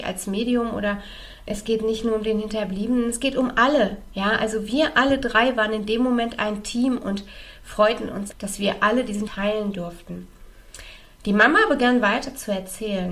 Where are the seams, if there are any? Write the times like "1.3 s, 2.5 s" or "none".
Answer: 1.5 s, 8.3 s, 9.3 s